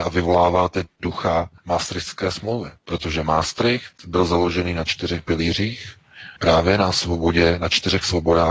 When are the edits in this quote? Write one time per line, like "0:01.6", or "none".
0:01.6
0:02.8
0:06.4